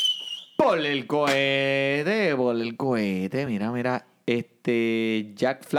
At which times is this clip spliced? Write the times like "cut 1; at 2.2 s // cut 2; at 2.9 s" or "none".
none